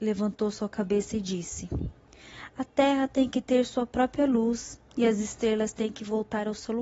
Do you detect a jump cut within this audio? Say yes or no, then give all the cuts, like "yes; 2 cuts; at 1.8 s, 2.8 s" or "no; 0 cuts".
no; 0 cuts